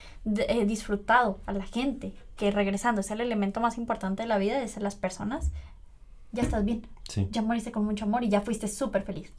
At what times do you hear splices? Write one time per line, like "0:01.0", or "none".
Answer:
none